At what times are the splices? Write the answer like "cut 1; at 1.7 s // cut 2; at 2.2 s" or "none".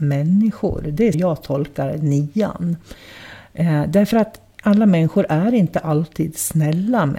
cut 1; at 1.1 s